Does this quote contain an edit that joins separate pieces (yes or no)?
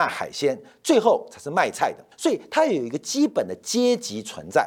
yes